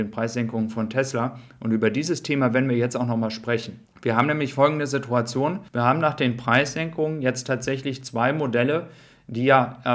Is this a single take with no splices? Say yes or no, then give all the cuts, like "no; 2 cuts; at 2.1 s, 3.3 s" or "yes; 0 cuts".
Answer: no; 2 cuts; at 3.8 s, 5.7 s